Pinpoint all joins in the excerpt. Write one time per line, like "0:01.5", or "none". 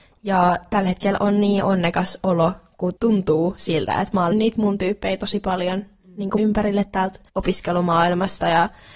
0:03.0
0:04.3
0:06.4
0:07.3